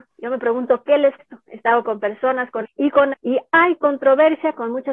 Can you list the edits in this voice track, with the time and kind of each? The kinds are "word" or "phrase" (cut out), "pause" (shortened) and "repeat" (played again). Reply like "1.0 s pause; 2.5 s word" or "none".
1.2 s word; 1.8 s word; 2.6 s word; 3.1 s word